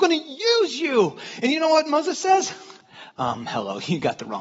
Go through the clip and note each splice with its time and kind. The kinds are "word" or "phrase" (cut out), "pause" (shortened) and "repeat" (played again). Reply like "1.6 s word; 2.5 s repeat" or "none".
none